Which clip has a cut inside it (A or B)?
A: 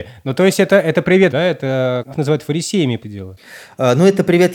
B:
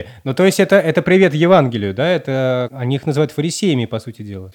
A